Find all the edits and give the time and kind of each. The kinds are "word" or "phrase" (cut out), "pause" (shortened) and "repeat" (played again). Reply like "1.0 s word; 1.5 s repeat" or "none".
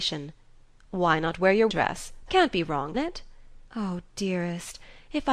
1.7 s word; 2.3 s word; 2.9 s word; 3.7 s pause